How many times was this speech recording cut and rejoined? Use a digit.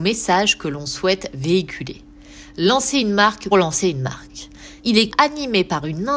3